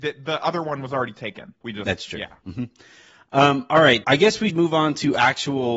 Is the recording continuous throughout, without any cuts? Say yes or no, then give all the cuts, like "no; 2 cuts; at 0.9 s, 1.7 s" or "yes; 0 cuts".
no; 3 cuts; at 1.6 s, 4.0 s, 4.5 s